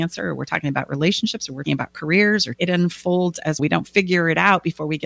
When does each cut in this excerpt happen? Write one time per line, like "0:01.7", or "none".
0:01.6
0:02.5
0:03.6